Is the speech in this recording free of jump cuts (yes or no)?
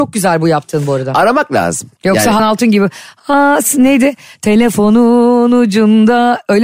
no